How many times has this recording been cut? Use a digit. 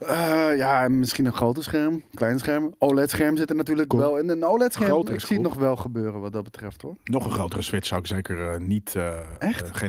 0